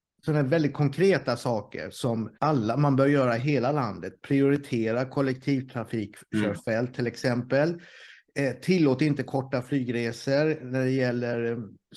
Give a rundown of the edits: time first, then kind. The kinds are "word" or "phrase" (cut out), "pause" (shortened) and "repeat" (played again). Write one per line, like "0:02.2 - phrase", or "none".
0:02.3 - pause